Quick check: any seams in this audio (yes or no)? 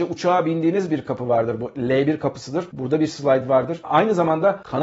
no